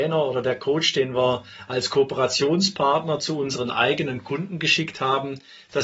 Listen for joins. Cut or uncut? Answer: uncut